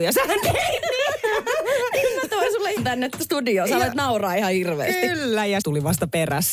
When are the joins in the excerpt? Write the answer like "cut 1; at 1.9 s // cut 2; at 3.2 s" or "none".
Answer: cut 1; at 2.8 s // cut 2; at 5.6 s